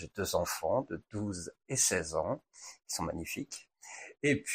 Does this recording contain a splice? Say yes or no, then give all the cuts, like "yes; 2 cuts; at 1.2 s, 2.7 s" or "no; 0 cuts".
no; 0 cuts